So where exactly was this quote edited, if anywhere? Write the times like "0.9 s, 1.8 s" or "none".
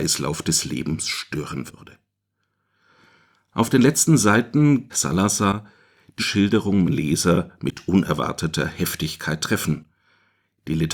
4.9 s, 6.2 s, 6.8 s